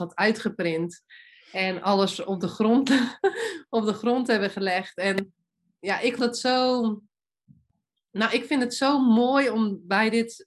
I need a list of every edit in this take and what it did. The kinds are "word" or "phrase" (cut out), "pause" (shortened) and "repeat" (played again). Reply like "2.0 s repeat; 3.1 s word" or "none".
6.2 s word